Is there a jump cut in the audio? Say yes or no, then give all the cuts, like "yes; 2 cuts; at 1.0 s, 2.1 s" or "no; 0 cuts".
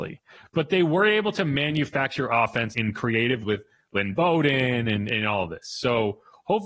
yes; 2 cuts; at 2.7 s, 3.4 s